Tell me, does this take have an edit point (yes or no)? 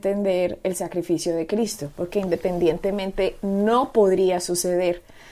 no